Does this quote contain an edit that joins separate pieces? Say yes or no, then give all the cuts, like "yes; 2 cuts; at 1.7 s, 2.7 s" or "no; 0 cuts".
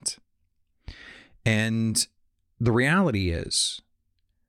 no; 0 cuts